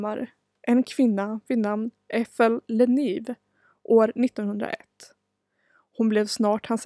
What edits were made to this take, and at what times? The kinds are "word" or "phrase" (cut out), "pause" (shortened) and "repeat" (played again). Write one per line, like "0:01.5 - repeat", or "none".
none